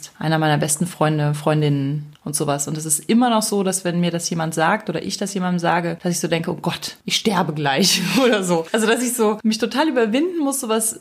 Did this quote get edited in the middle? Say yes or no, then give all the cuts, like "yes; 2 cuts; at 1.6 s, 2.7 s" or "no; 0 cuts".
no; 0 cuts